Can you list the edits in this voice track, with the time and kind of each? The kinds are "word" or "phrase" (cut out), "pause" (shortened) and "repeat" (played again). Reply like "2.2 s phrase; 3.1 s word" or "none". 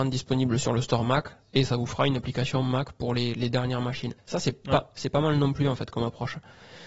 4.2 s pause